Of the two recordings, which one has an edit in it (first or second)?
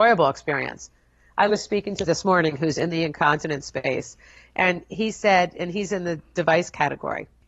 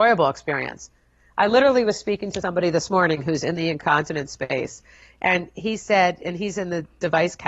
first